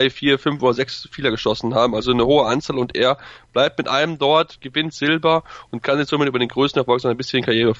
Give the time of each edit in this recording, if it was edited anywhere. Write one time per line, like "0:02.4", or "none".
none